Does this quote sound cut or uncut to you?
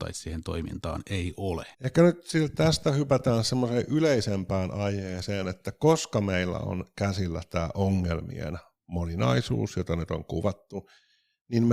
cut